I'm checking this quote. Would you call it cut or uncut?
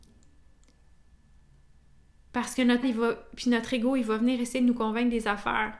cut